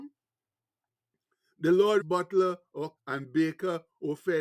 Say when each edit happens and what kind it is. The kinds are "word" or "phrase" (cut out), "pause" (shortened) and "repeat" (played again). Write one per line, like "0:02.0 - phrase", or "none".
0:02.0 - phrase
0:03.0 - word